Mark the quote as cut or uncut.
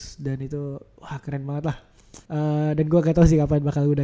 cut